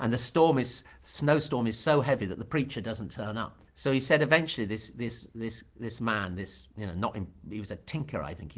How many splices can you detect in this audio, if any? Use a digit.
1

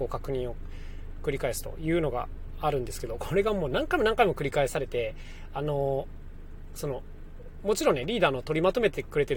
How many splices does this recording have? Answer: 0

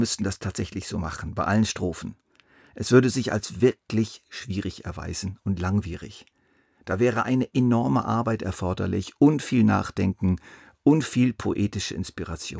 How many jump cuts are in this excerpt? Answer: 0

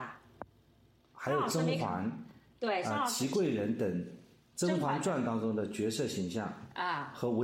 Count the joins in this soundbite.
0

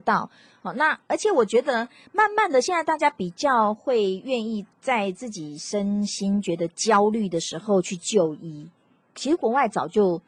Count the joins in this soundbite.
0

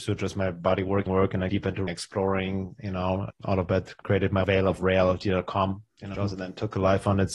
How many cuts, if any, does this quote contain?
7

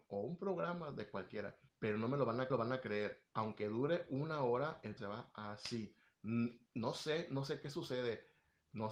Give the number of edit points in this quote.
2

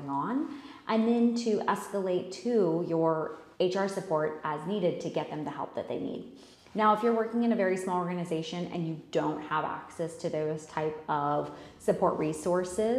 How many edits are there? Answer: 2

